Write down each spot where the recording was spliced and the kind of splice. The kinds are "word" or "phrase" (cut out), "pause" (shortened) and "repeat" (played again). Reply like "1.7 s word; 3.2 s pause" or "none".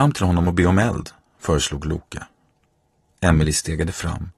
none